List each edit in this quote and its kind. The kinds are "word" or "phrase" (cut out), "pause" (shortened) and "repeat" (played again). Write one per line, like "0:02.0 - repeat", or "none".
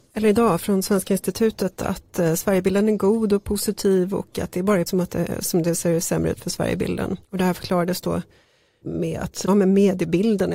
0:04.9 - word
0:07.2 - pause
0:08.8 - word
0:09.5 - word